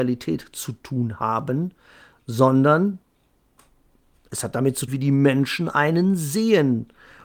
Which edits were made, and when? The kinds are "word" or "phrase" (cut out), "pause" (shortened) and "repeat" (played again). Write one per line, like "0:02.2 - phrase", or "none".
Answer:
0:04.9 - word